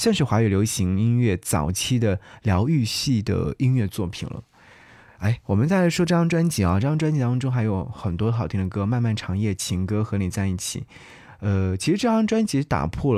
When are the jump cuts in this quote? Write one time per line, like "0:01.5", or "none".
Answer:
none